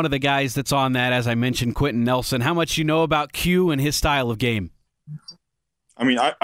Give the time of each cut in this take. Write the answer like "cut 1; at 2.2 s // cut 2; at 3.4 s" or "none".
none